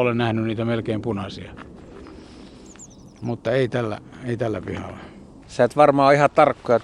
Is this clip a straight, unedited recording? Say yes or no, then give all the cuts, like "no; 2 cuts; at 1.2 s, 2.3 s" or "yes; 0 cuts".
no; 1 cut; at 5.4 s